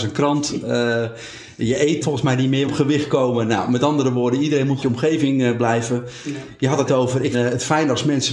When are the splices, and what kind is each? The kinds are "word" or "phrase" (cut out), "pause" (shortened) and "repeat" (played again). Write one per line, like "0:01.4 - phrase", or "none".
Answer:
0:02.0 - word
0:02.6 - phrase
0:04.8 - phrase
0:06.9 - word
0:07.3 - word